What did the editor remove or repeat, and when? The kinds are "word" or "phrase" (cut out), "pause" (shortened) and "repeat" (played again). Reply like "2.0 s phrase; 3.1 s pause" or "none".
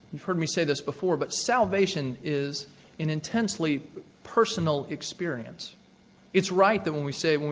none